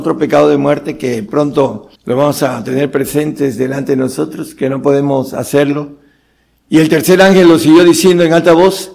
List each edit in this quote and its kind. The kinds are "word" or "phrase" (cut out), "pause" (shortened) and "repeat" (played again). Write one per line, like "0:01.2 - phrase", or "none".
0:02.0 - pause

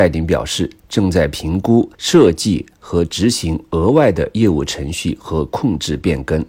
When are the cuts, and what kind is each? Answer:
0:01.9 - pause

